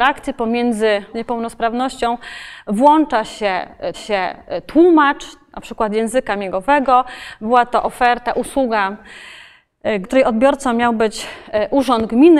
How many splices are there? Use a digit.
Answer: 3